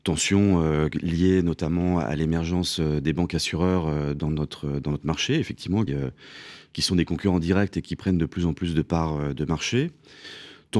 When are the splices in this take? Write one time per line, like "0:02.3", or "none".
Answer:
0:05.9